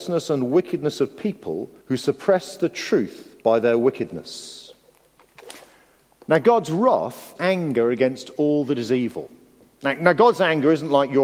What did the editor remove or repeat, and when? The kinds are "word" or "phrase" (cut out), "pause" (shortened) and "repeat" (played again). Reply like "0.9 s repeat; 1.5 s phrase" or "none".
1.8 s pause; 3.4 s pause; 7.4 s phrase